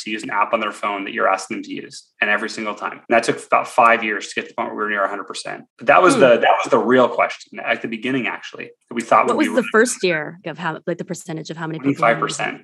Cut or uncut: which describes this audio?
cut